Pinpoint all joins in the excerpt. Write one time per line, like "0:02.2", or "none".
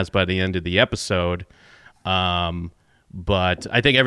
none